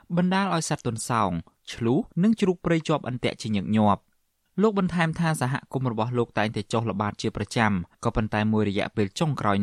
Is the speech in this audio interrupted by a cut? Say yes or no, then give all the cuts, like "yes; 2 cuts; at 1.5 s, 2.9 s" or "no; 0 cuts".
yes; 2 cuts; at 2.1 s, 7.9 s